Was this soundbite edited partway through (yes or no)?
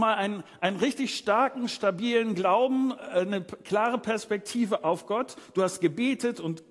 no